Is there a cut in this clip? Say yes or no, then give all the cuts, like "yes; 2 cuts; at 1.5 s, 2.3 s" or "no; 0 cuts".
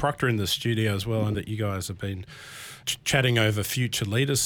yes; 2 cuts; at 1.3 s, 2.8 s